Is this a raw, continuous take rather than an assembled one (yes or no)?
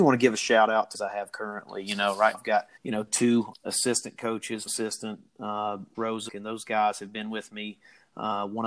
no